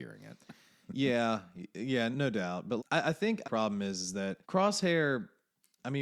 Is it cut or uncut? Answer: cut